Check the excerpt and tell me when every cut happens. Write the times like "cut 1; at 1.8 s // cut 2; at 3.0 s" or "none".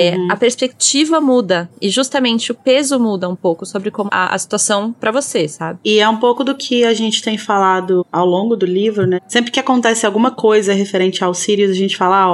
cut 1; at 4.1 s // cut 2; at 5.0 s

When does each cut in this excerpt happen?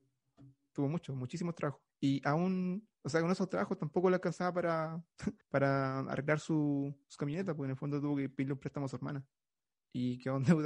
cut 1; at 1.9 s // cut 2; at 2.9 s // cut 3; at 5.4 s // cut 4; at 7.0 s

